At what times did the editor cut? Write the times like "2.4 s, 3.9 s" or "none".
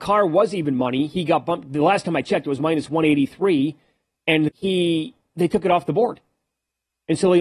4.5 s

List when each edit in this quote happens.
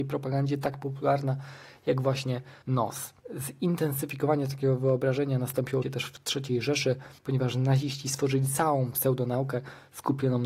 2.6 s, 3.2 s, 5.8 s, 7.2 s

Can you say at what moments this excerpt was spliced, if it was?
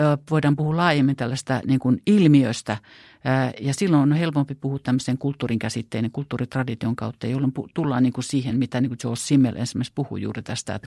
none

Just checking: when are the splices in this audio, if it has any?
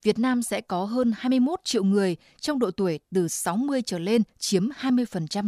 4.3 s

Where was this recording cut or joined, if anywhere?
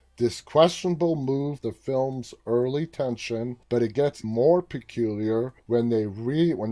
1.6 s, 3.6 s, 4.2 s, 5.6 s

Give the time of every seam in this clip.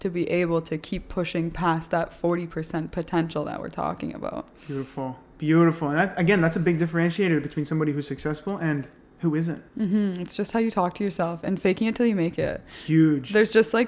none

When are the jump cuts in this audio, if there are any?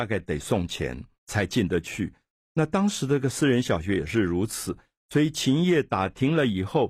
1.1 s

